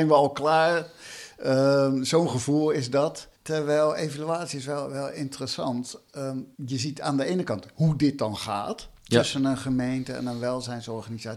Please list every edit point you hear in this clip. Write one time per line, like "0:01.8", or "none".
0:03.3
0:06.5